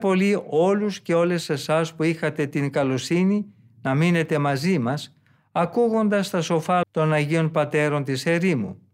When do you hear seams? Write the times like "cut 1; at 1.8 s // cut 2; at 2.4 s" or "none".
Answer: cut 1; at 6.8 s